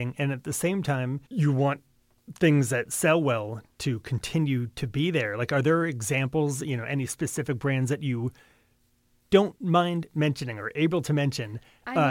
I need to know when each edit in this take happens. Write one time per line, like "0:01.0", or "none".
0:01.3

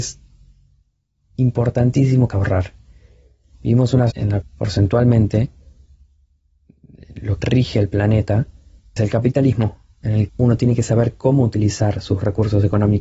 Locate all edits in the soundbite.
0:02.3
0:04.1
0:04.4
0:07.4
0:09.0
0:10.3

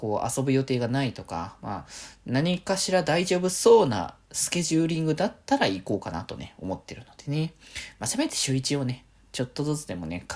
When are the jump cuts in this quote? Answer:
none

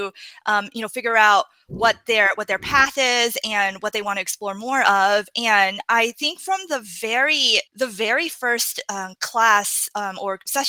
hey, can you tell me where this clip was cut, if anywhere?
0:07.7

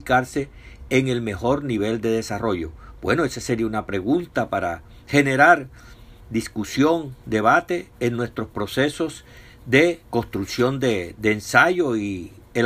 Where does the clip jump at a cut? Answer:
0:10.1

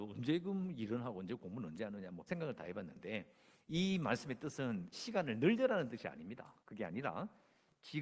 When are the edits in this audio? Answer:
0:02.3
0:03.5
0:04.9
0:06.6

